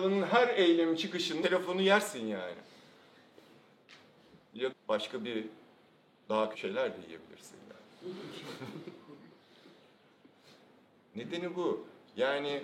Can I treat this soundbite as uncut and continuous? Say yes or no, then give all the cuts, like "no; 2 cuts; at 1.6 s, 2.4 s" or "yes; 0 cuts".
no; 3 cuts; at 1.4 s, 4.7 s, 6.5 s